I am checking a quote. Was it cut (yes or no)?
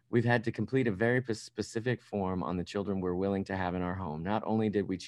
no